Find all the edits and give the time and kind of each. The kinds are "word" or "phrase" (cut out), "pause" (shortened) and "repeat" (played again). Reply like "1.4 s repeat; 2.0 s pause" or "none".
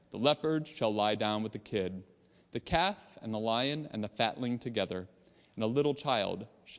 none